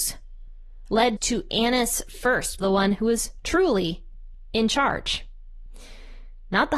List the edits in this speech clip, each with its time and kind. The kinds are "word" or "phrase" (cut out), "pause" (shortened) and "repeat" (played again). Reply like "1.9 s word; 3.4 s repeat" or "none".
1.2 s word; 2.6 s phrase